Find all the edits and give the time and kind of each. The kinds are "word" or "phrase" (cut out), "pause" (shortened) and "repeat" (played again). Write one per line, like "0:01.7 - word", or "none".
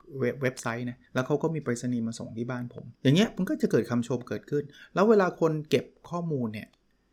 0:01.1 - pause
0:03.0 - pause